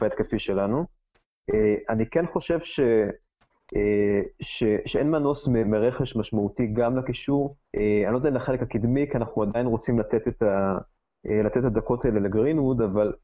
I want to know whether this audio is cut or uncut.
cut